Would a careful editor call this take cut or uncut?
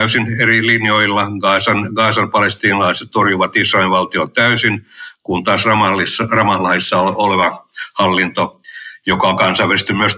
uncut